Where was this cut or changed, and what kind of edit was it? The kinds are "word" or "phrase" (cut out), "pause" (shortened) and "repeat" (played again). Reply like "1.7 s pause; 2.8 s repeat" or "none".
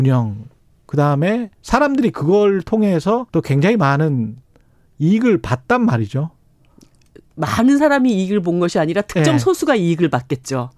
3.3 s pause

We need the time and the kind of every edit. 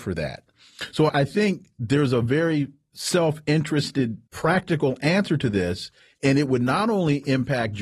1.1 s word; 4.3 s pause

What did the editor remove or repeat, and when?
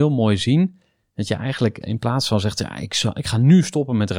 none

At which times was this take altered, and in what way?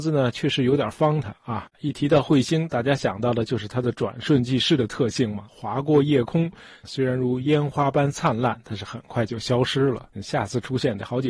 1.7 s pause; 5.5 s word; 10.1 s pause

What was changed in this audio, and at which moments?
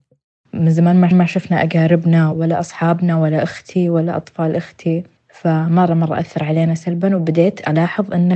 1.1 s repeat; 2.3 s word; 5.2 s pause

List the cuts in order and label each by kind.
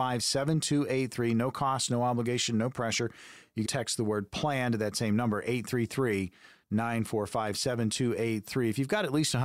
3.6 s word

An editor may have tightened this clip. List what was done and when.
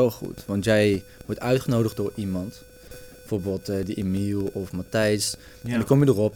none

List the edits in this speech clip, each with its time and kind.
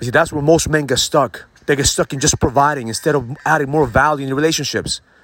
1.6 s pause

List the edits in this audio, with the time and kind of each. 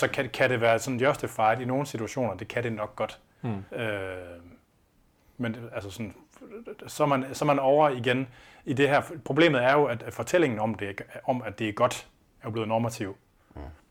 3.7 s pause

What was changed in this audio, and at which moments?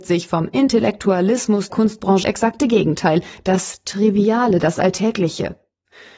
1.7 s word; 2.2 s phrase

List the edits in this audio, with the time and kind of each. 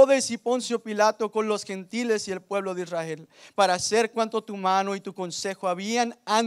none

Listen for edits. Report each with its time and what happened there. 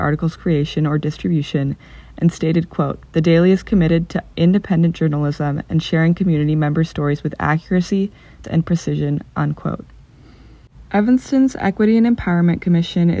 8.4 s word; 10.9 s pause

